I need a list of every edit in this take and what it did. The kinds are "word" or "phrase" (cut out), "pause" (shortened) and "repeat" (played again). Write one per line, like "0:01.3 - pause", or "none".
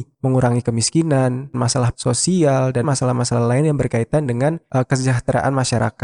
0:01.5 - word
0:01.9 - word
0:02.8 - word